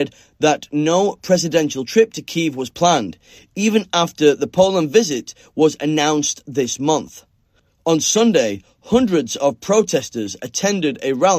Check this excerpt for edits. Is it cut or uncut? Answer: uncut